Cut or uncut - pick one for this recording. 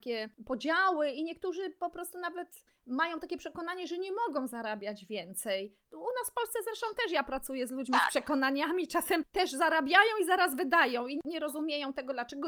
uncut